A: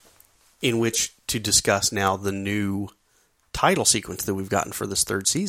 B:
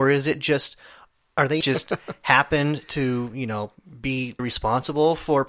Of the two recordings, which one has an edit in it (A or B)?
B